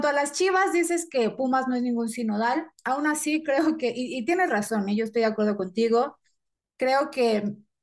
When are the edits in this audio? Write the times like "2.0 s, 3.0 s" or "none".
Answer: none